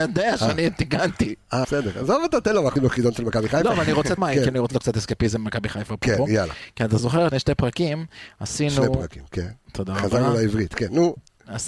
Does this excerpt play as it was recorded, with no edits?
no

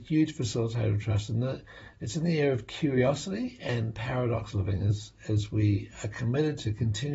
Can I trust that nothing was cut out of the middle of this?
yes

